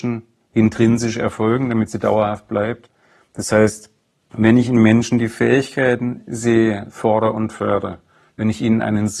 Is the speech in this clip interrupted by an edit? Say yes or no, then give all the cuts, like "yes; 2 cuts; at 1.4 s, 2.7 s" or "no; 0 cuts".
no; 0 cuts